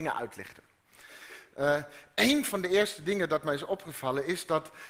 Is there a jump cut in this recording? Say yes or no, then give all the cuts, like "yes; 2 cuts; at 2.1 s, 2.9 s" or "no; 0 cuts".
no; 0 cuts